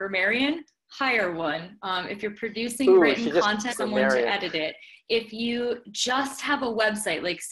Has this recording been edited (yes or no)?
yes